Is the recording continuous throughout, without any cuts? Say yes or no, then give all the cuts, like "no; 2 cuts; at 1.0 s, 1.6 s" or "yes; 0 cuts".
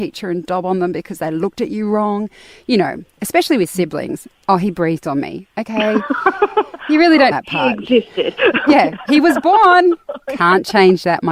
no; 1 cut; at 7.3 s